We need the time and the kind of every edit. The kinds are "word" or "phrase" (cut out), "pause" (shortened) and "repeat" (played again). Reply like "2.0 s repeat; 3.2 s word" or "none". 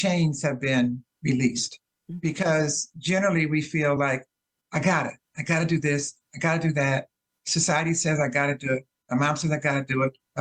none